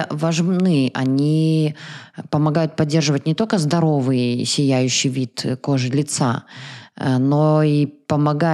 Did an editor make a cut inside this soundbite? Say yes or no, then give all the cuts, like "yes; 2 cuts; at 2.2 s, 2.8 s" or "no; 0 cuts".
no; 0 cuts